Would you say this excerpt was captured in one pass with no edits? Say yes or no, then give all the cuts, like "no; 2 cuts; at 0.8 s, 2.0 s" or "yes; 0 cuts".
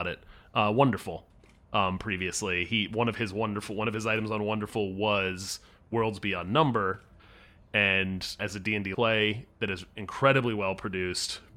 no; 2 cuts; at 8.4 s, 8.9 s